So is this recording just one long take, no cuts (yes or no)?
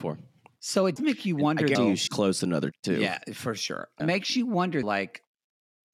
no